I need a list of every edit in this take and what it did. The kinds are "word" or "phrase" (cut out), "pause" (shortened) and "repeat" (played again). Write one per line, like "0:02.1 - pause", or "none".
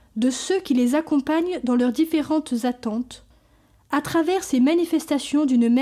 none